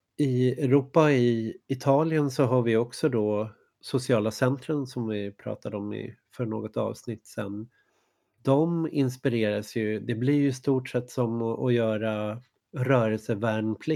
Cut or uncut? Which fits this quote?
uncut